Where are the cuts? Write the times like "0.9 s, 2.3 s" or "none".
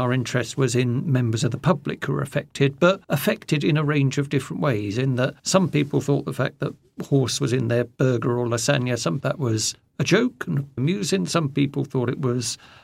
3.0 s, 5.4 s, 9.2 s, 10.8 s